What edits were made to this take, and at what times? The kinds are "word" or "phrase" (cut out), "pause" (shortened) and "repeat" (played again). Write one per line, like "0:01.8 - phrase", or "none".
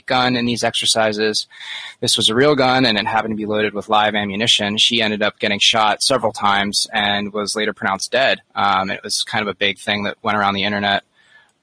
0:08.4 - pause